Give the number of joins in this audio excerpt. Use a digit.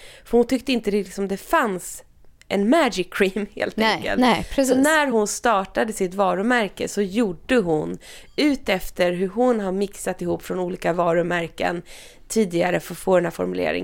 0